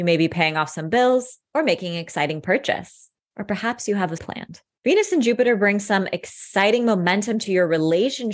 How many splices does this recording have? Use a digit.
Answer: 1